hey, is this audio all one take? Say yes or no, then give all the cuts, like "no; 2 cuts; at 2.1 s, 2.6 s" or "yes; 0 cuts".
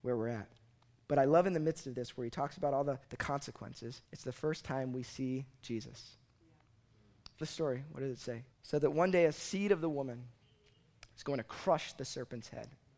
no; 4 cuts; at 3.0 s, 4.0 s, 7.4 s, 8.5 s